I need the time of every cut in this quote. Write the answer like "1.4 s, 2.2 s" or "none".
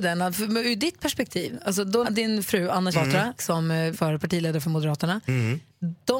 2.0 s, 2.9 s, 3.4 s, 3.9 s